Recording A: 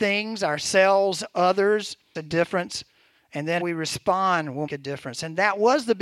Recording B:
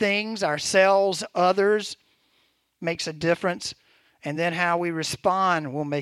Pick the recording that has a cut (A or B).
A